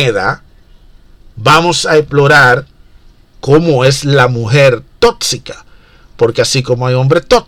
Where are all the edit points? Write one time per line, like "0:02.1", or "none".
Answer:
none